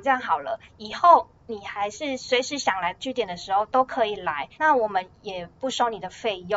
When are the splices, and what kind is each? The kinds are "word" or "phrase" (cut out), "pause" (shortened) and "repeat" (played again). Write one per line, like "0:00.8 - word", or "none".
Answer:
0:04.5 - pause